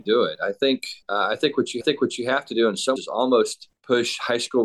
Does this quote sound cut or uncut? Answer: cut